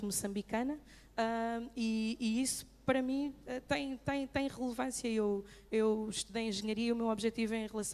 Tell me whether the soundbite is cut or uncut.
uncut